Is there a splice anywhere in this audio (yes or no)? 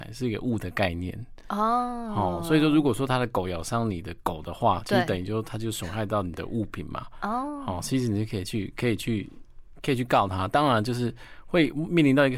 no